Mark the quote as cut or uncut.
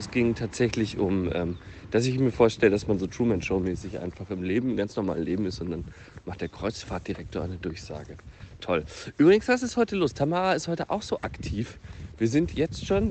uncut